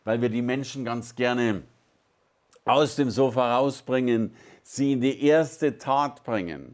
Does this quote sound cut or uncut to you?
uncut